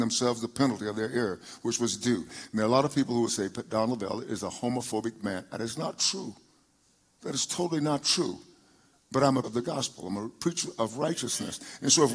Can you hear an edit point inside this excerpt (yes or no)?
yes